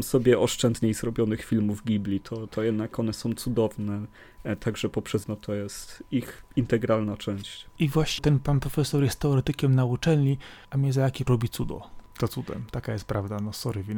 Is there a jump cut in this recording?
yes; 4 cuts; at 2.9 s, 5.2 s, 8.2 s, 11.3 s

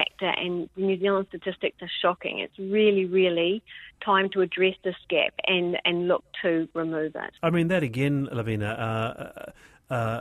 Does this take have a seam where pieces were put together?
yes; 1 cut; at 7.4 s

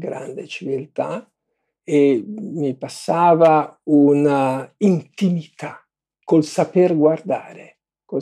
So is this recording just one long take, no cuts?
yes; 0 cuts

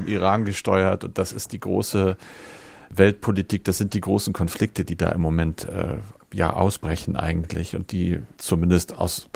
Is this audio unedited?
yes; 0 cuts

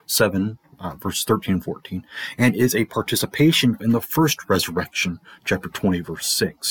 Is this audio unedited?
no; 1 cut; at 3.8 s

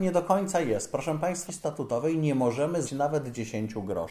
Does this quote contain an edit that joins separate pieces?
yes; 2 cuts; at 1.5 s, 2.8 s

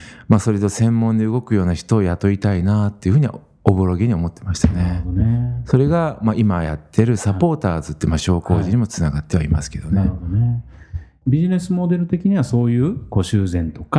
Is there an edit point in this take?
no; 0 cuts

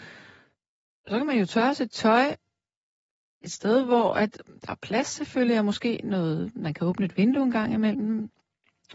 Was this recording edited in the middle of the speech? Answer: no; 0 cuts

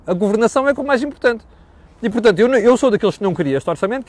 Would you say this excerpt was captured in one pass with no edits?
yes; 0 cuts

